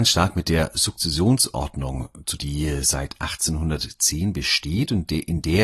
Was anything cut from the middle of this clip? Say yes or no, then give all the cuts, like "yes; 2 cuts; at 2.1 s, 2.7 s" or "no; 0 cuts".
yes; 1 cut; at 2.4 s